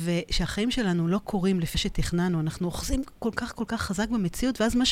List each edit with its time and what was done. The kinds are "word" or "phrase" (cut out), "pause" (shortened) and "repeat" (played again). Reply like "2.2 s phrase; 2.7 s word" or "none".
1.7 s word